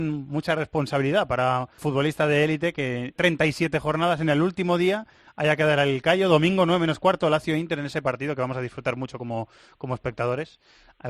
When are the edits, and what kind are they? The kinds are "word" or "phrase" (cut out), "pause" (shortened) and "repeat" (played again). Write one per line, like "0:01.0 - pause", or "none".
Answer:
0:01.8 - phrase
0:03.2 - phrase